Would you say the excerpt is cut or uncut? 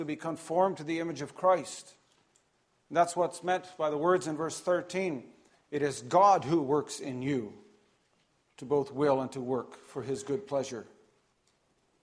uncut